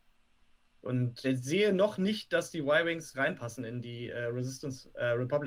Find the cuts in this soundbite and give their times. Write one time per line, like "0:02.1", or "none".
0:01.2
0:03.1